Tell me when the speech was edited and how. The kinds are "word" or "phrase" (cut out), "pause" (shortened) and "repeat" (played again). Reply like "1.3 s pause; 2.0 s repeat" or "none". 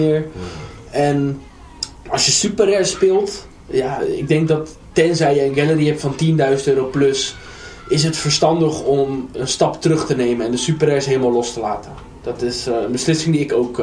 9.3 s word